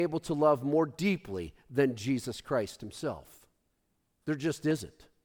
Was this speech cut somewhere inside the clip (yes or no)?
no